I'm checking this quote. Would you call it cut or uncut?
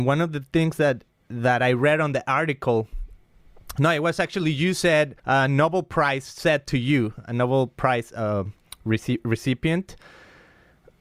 cut